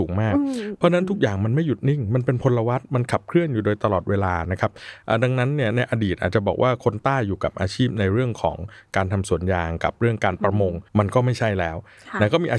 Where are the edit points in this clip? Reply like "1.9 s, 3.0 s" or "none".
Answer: 10.9 s